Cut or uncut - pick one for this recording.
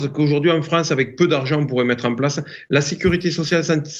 uncut